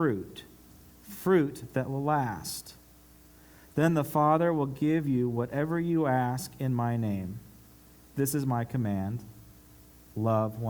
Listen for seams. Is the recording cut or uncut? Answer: uncut